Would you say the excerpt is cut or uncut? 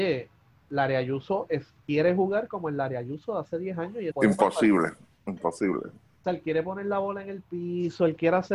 cut